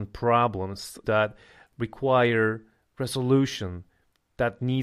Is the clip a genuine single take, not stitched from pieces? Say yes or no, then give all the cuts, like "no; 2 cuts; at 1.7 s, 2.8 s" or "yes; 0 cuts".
no; 1 cut; at 1.0 s